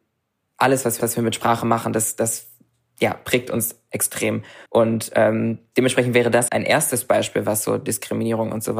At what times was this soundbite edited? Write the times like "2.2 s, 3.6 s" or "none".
1.0 s, 4.7 s, 6.5 s